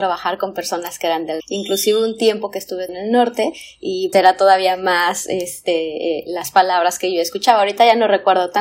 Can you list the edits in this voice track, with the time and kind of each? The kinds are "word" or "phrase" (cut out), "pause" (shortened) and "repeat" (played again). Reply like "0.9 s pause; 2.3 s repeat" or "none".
1.4 s word; 2.9 s word; 4.1 s word